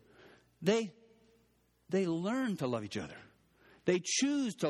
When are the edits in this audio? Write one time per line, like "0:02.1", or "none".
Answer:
none